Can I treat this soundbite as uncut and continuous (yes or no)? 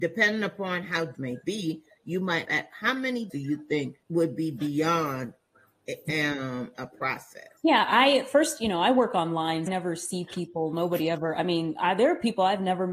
no